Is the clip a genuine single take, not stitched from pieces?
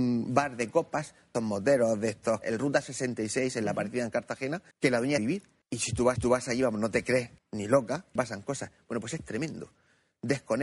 no; 8 cuts; at 1.3 s, 2.4 s, 4.7 s, 5.2 s, 5.6 s, 6.2 s, 7.4 s, 8.2 s

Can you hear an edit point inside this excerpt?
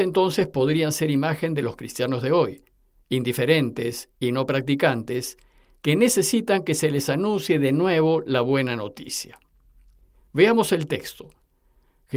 no; 0 cuts

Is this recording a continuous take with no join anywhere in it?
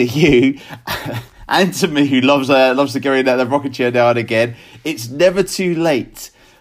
yes; 0 cuts

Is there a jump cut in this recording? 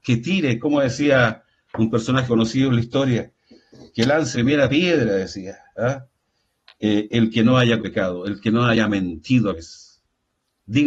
yes; 4 cuts; at 2.3 s, 4.3 s, 7.8 s, 9.5 s

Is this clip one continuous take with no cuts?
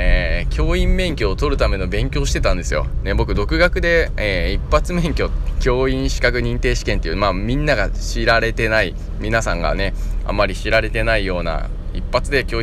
no; 1 cut; at 5.6 s

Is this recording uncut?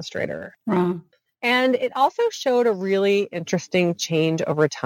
yes; 0 cuts

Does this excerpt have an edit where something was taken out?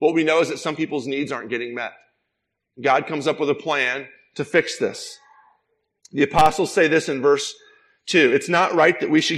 no; 0 cuts

